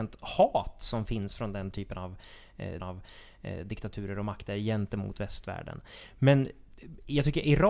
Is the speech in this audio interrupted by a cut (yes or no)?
yes